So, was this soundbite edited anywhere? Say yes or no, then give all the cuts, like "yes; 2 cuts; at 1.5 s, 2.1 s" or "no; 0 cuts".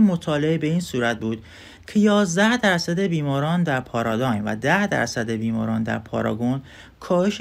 no; 0 cuts